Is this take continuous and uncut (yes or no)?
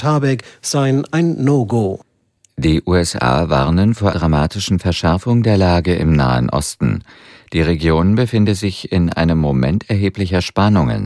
no